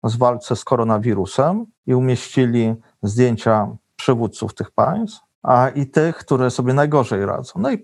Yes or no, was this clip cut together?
yes